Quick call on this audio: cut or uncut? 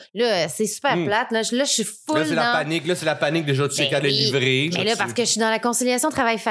cut